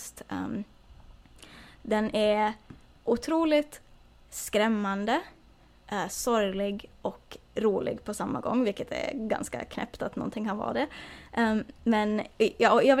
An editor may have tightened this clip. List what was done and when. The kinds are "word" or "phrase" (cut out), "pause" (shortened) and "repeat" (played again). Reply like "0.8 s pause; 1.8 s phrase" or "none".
none